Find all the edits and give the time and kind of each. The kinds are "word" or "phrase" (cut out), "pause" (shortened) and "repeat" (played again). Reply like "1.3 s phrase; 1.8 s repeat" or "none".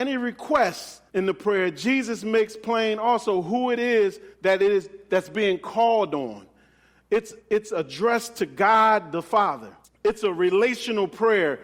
1.1 s pause; 4.3 s pause; 7.4 s pause; 9.8 s pause